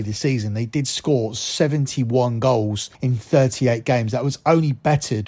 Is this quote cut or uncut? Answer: cut